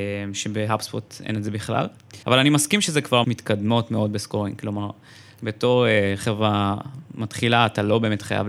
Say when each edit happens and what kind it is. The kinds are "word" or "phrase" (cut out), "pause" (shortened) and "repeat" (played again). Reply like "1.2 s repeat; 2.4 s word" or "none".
2.2 s pause; 3.2 s phrase

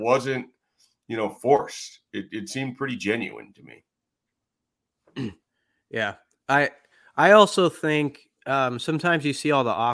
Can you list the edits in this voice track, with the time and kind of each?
5.4 s pause; 8.4 s pause

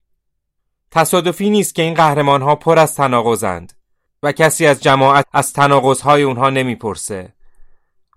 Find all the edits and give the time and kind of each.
5.2 s word

